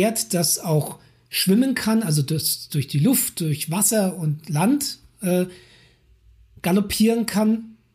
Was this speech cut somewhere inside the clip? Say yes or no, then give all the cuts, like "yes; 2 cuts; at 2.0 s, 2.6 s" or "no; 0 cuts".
no; 0 cuts